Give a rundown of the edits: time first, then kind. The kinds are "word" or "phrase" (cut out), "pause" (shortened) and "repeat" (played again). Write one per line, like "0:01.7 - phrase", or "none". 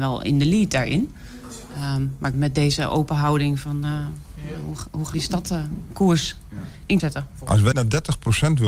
0:02.3 - phrase
0:05.1 - word
0:07.0 - word
0:07.7 - word